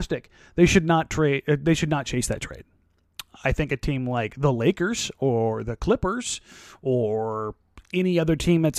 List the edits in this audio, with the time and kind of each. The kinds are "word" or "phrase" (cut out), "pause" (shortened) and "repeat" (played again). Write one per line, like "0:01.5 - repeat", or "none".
none